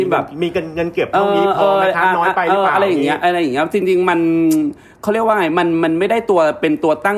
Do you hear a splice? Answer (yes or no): no